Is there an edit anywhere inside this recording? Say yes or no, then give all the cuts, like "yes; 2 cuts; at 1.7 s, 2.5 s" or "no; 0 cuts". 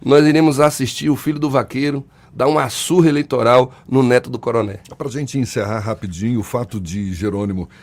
no; 0 cuts